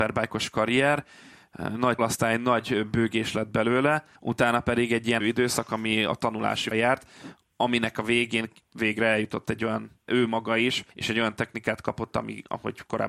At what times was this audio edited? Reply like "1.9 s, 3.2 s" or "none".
2.0 s, 4.2 s, 5.2 s, 6.7 s, 10.1 s, 10.9 s